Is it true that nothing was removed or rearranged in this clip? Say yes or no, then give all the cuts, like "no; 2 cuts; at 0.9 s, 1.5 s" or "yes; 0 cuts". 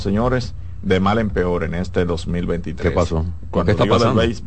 yes; 0 cuts